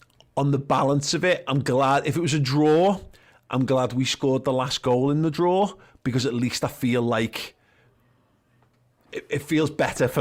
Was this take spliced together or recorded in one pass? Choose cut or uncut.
uncut